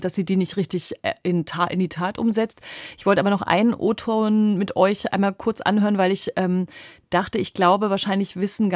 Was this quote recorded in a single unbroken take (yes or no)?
yes